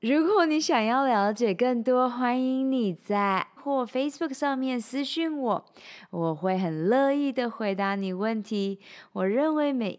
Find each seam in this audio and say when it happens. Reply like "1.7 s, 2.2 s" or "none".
3.6 s